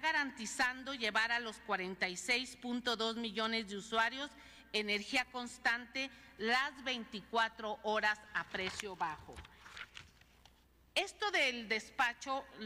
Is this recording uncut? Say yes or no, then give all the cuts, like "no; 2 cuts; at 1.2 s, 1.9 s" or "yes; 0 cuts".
yes; 0 cuts